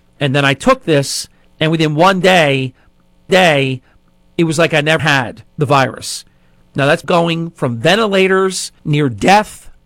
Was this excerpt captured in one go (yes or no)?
no